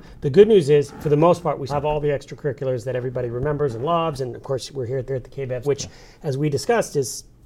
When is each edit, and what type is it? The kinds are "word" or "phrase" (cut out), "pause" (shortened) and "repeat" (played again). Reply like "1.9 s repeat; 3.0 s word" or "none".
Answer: 1.7 s word; 5.1 s repeat; 5.6 s word